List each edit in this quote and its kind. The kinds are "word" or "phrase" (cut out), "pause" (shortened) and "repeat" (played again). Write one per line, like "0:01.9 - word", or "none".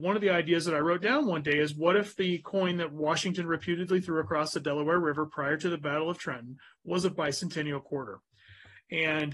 none